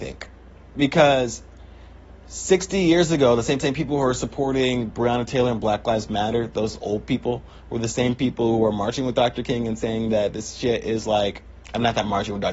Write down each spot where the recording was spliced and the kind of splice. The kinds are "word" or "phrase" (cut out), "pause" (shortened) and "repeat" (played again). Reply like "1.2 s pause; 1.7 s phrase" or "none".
3.6 s repeat

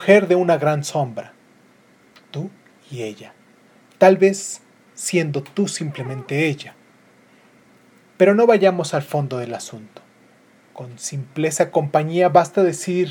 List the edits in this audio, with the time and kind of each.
none

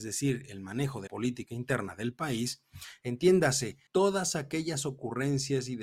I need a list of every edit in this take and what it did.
1.1 s word; 3.9 s pause

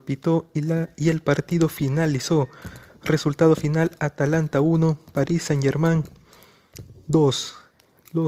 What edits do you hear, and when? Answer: none

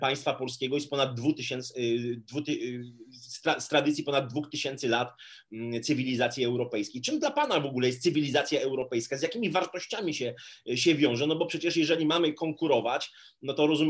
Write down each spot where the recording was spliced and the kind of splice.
none

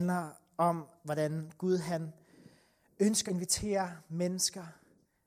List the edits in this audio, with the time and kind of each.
3.3 s word

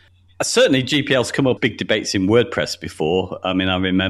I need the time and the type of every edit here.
1.6 s word

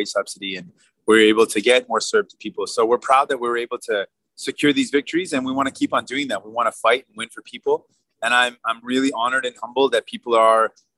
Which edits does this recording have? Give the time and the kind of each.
none

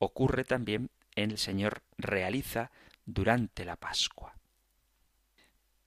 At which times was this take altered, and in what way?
1.4 s phrase; 1.9 s pause

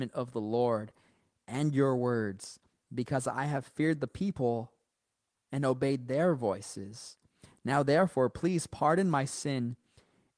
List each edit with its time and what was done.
none

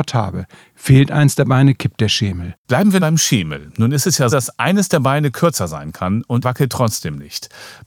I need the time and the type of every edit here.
3.0 s word; 4.3 s word; 6.4 s word

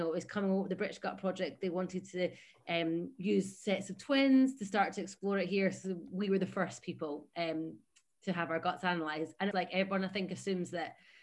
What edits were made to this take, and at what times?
9.5 s phrase

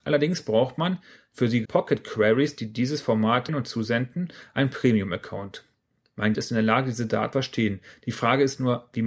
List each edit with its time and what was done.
1.6 s word; 3.5 s word; 6.3 s word; 7.3 s word

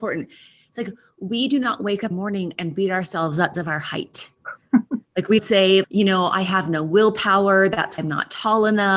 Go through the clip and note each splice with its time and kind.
2.1 s word; 3.5 s word; 5.4 s word; 5.8 s word; 8.0 s word

